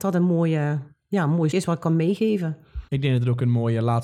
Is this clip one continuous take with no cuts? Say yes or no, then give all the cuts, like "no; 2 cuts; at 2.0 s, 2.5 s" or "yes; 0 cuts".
no; 2 cuts; at 1.5 s, 2.9 s